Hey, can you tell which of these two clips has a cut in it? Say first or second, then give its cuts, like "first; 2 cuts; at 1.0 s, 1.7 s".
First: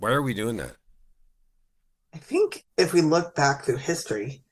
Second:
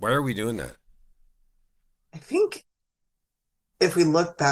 first; 1 cut; at 2.7 s